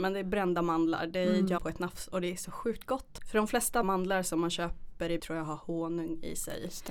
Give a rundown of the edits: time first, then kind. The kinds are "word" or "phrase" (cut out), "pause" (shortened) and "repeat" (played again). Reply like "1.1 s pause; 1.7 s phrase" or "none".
1.6 s word; 3.8 s word; 5.2 s word